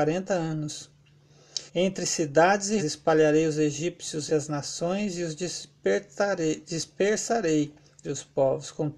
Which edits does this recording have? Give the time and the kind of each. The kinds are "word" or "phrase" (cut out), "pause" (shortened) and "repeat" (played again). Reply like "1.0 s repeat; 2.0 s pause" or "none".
1.7 s pause; 2.8 s word; 4.3 s word; 8.0 s word